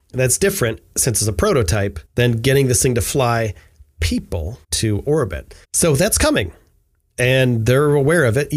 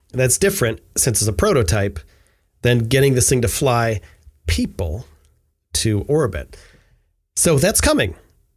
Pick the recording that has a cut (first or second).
first